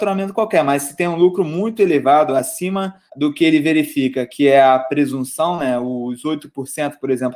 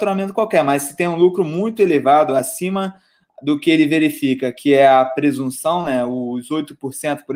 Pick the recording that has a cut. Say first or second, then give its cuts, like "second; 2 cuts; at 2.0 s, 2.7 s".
first; 1 cut; at 3.1 s